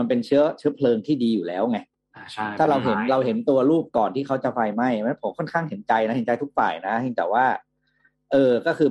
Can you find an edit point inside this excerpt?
no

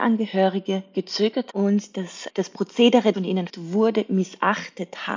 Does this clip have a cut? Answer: yes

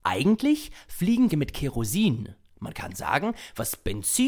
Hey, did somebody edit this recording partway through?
yes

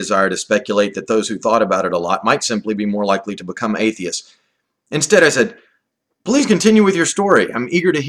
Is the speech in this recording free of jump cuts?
yes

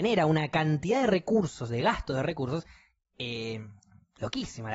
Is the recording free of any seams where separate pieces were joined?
yes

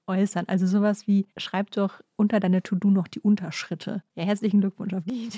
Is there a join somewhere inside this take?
yes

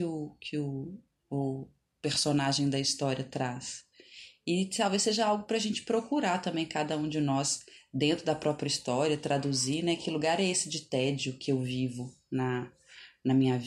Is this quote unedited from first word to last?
yes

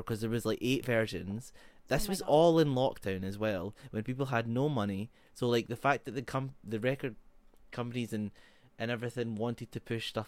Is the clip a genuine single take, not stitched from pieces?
yes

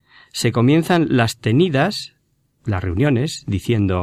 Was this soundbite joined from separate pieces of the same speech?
no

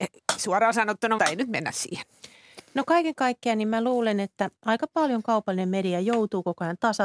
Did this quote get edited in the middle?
yes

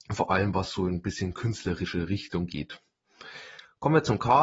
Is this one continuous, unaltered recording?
yes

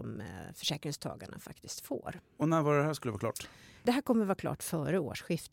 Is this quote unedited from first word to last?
yes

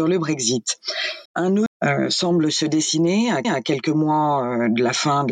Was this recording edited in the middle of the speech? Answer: yes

